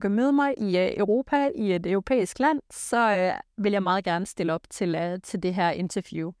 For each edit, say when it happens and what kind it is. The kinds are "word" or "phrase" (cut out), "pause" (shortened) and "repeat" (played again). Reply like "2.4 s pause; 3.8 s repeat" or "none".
none